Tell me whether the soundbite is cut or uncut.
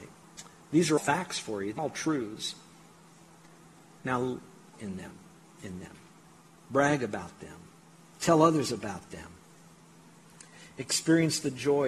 cut